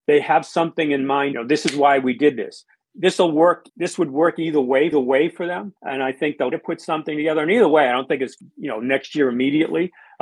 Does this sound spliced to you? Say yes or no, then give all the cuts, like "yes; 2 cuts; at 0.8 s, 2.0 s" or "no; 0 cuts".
yes; 6 cuts; at 1.3 s, 3.7 s, 4.9 s, 5.8 s, 6.5 s, 8.4 s